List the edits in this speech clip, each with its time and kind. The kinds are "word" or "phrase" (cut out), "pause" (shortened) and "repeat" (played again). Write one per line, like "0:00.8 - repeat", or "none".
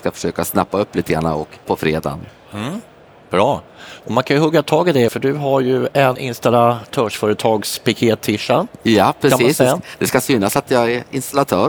0:01.6 - word
0:05.1 - word
0:06.1 - word